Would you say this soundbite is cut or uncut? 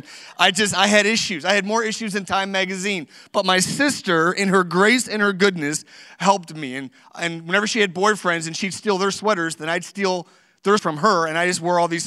cut